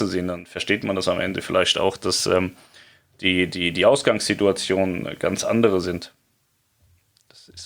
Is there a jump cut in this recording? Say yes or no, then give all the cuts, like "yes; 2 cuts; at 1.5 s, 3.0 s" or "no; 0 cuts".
no; 0 cuts